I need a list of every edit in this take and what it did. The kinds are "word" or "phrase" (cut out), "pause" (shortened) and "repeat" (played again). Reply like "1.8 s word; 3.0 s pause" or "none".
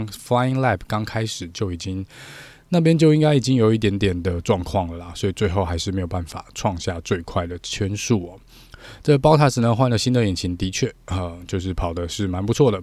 none